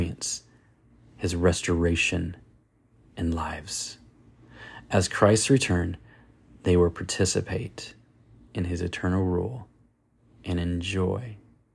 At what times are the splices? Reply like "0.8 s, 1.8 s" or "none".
none